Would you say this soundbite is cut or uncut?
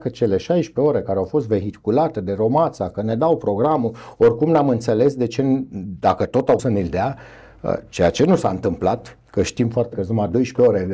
cut